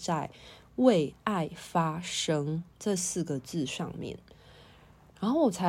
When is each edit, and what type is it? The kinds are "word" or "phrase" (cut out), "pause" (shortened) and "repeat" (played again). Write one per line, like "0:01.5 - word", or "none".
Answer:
0:02.7 - pause